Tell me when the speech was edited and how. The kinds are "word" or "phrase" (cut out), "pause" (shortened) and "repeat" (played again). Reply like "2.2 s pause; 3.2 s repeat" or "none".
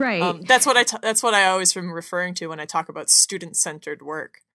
none